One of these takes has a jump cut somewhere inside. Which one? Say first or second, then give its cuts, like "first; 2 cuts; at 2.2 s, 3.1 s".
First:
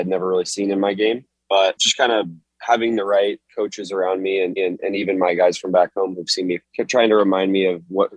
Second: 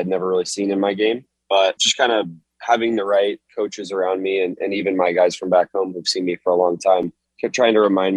first; 2 cuts; at 4.6 s, 6.6 s